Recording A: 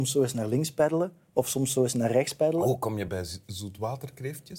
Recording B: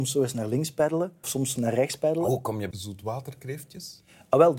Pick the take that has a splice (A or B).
B